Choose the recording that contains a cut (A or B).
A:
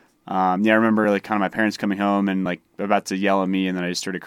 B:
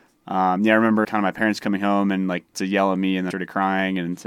B